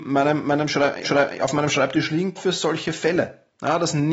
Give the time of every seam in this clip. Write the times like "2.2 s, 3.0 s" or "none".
1.0 s, 2.4 s